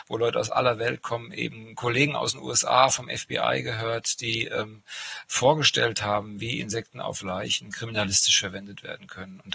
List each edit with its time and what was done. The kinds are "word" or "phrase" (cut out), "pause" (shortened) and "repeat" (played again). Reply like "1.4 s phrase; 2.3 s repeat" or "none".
none

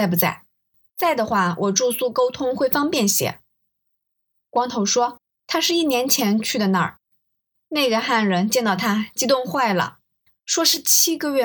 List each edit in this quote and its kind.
none

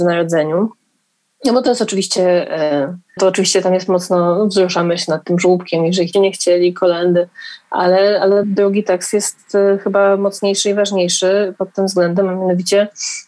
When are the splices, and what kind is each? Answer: 3.2 s word; 6.1 s phrase; 8.4 s word

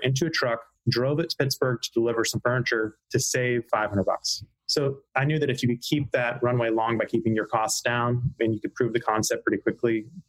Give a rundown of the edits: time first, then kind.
3.7 s word

